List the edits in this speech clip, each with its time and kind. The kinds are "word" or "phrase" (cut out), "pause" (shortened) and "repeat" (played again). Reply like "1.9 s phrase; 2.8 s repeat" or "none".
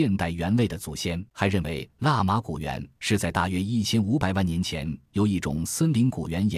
1.3 s pause